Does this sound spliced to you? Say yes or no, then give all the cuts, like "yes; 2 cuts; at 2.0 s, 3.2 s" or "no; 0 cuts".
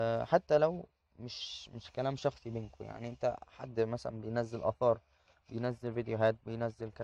no; 0 cuts